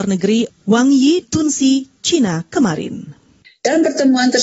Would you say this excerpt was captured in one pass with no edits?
no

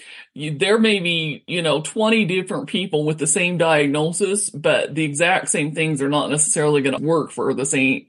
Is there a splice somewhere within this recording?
yes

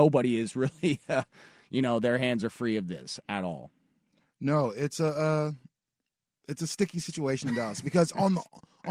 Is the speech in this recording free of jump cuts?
yes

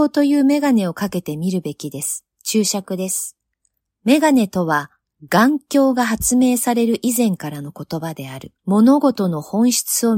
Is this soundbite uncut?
no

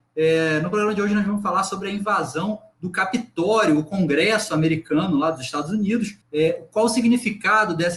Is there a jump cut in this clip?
yes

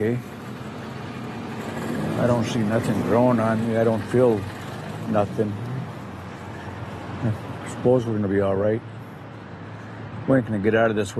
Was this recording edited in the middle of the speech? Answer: no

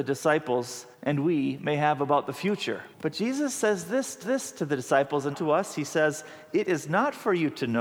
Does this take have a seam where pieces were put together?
yes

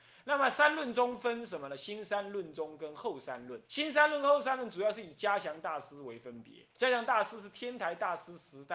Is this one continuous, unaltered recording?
no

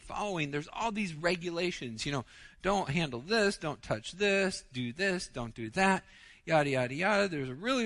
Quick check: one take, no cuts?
yes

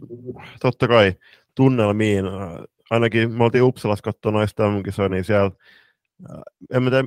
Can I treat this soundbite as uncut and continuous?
yes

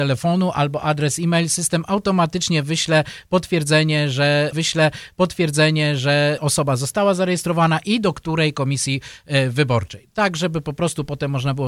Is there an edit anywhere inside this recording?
yes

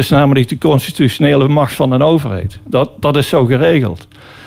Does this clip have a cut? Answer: no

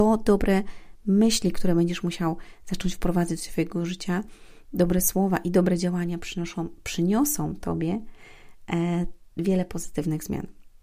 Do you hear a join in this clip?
yes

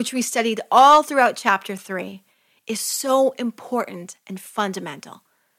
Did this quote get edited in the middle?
no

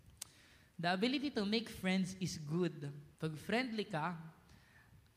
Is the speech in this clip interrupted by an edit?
yes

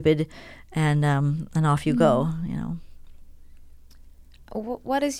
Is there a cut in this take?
no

